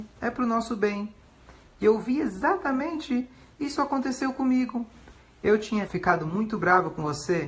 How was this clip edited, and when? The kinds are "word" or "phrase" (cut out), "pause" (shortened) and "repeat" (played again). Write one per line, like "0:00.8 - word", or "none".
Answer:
0:05.9 - word

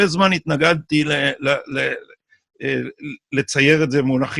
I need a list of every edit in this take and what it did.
none

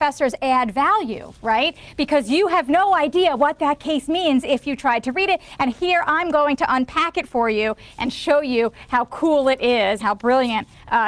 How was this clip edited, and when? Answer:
0:10.0 - word

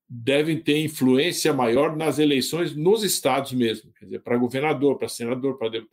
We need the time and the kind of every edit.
none

